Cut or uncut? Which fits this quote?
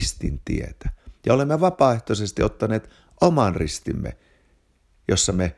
uncut